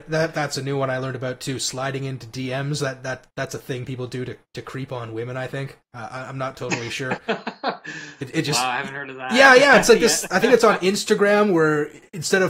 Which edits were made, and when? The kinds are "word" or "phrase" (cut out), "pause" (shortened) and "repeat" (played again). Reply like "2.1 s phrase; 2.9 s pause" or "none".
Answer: 5.8 s pause